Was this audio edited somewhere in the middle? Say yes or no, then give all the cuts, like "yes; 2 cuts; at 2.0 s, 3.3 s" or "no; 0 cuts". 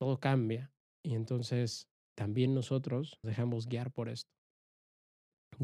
yes; 1 cut; at 3.2 s